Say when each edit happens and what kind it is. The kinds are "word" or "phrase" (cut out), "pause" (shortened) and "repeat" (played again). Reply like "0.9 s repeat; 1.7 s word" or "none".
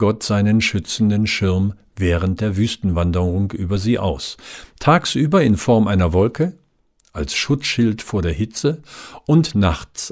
none